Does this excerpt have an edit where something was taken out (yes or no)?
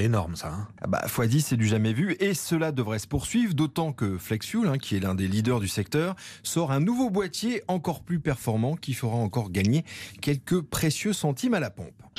no